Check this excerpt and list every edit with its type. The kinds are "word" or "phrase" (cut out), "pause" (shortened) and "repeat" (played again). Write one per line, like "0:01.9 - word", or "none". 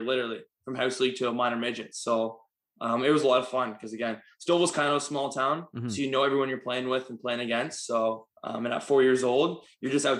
0:08.4 - pause